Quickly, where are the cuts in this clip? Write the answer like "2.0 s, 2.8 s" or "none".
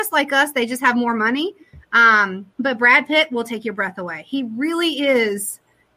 2.5 s

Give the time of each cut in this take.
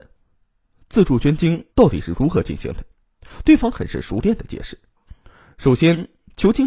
1.7 s, 2.9 s, 4.9 s

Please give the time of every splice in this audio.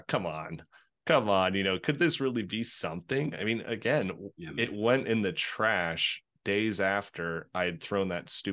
none

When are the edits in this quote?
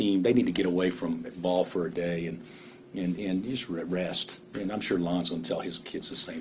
none

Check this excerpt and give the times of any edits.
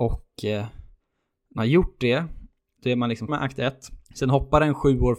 1.6 s, 3.3 s, 4.1 s

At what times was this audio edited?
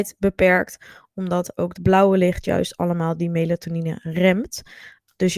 1.7 s

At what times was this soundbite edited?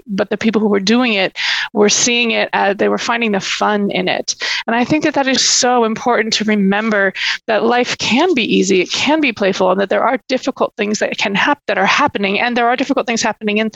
5.4 s

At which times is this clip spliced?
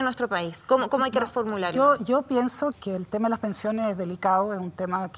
2.7 s

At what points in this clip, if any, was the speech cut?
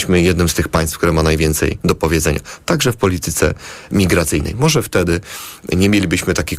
none

